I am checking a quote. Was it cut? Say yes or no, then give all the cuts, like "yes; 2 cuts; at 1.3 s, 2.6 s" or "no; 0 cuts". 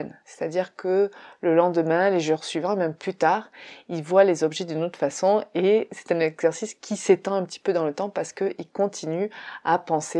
no; 0 cuts